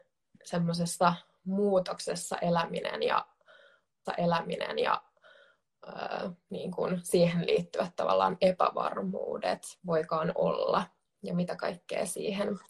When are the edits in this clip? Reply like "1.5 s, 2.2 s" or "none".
4.0 s, 9.8 s